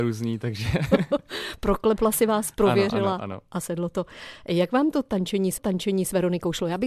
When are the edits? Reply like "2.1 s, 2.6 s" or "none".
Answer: 5.6 s